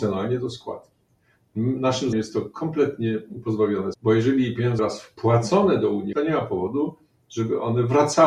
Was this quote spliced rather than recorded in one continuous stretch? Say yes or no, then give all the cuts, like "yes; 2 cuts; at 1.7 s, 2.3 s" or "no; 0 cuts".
yes; 4 cuts; at 2.1 s, 3.9 s, 4.8 s, 6.1 s